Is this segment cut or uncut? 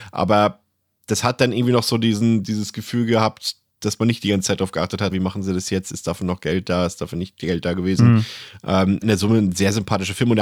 cut